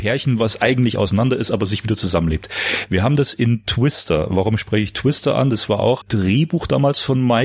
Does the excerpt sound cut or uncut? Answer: cut